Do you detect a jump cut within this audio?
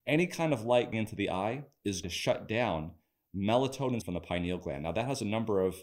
yes; 3 cuts; at 0.9 s, 2.0 s, 4.0 s

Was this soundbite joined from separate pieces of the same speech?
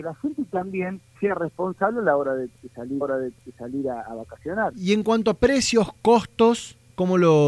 yes; 2 cuts; at 1.1 s, 3.0 s

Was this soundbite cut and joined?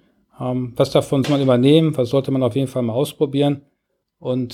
yes; 1 cut; at 1.2 s

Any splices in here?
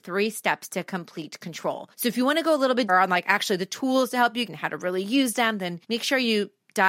yes; 4 cuts; at 1.9 s, 2.9 s, 4.5 s, 5.8 s

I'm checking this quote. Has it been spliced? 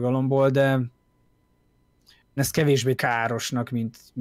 yes; 2 cuts; at 2.4 s, 2.9 s

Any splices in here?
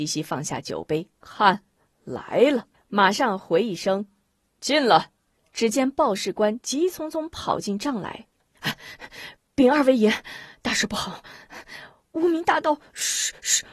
yes; 4 cuts; at 1.2 s, 2.7 s, 5.2 s, 8.3 s

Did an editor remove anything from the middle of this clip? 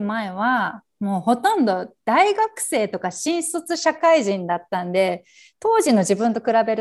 no; 0 cuts

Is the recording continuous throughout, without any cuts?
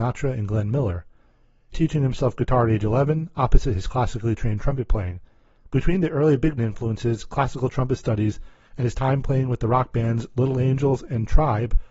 no; 2 cuts; at 1.7 s, 6.6 s

